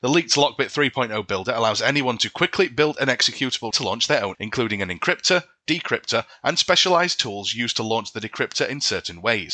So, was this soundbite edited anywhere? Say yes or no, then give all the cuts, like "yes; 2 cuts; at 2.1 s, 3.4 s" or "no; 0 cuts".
yes; 2 cuts; at 3.7 s, 4.3 s